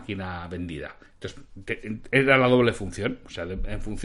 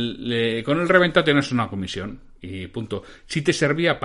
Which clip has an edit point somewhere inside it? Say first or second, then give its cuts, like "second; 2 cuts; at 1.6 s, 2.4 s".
first; 1 cut; at 1.1 s